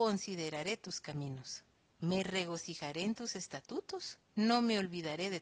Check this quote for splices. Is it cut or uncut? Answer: cut